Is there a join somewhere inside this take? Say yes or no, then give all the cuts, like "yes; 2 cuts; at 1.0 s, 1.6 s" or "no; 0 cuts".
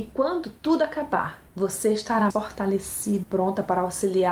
yes; 3 cuts; at 1.5 s, 2.3 s, 3.2 s